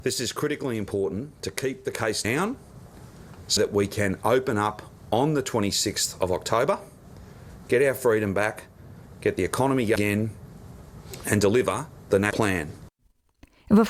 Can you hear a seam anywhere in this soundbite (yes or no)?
yes